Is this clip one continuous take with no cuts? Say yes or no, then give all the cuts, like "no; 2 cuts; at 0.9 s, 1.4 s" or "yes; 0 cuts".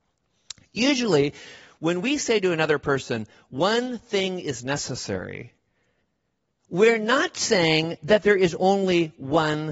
yes; 0 cuts